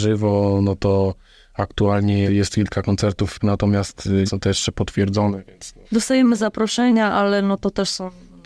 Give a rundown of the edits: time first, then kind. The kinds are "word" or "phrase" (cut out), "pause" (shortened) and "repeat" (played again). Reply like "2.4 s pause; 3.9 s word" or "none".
2.3 s word; 3.4 s word; 4.3 s word; 5.8 s pause

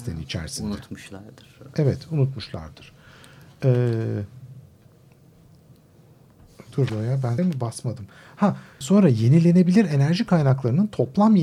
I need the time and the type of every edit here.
6.9 s word; 7.4 s word; 8.8 s word

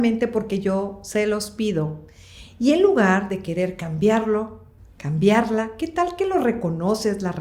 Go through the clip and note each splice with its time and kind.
4.8 s pause

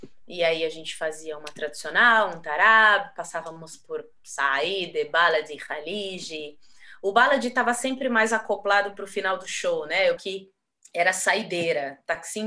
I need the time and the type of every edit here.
10.2 s word; 10.7 s pause

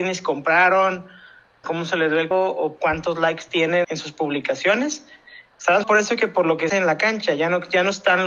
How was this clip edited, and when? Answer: 1.6 s word; 2.3 s word; 2.8 s word; 3.8 s word; 5.8 s word; 6.7 s word

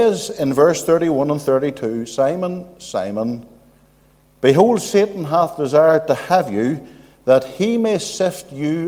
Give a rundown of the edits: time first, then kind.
none

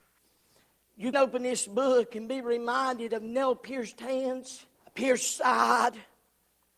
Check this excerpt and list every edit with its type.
1.1 s word; 4.7 s pause

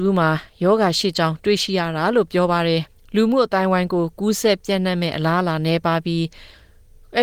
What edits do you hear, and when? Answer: 2.9 s pause

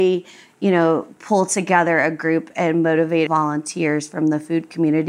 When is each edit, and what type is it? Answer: 3.3 s phrase

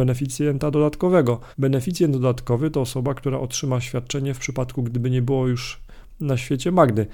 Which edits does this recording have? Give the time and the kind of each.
1.5 s pause

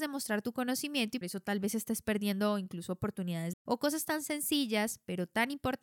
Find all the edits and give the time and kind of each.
1.2 s word; 3.5 s word

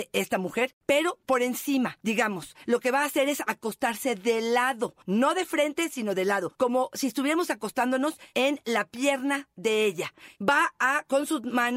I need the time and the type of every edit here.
none

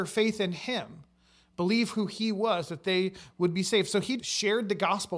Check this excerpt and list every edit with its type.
4.2 s word

